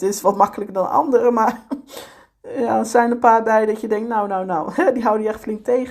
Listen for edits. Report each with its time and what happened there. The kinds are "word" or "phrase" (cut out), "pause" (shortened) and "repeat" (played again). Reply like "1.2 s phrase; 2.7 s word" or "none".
none